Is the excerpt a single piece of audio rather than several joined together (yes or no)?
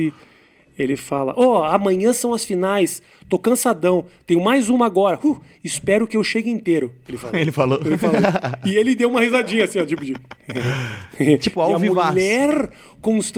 yes